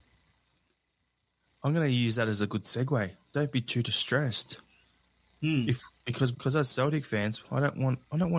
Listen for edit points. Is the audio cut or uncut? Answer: cut